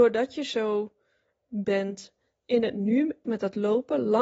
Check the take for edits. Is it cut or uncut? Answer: cut